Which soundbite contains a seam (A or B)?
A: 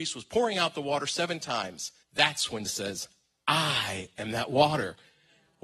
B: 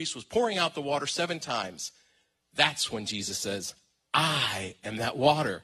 A